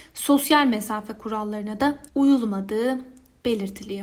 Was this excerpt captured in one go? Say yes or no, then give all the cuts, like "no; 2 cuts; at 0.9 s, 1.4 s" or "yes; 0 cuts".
no; 1 cut; at 2.1 s